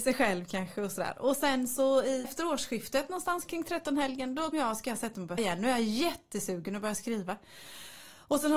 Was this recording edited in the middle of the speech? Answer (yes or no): yes